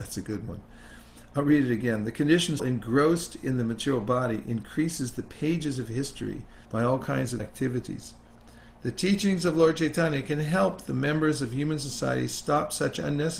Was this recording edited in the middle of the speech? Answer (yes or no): yes